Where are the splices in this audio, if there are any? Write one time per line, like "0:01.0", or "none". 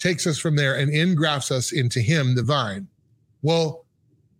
none